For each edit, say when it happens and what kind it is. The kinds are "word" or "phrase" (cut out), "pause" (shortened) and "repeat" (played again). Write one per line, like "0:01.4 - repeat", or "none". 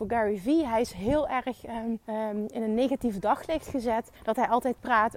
0:02.0 - pause
0:04.2 - pause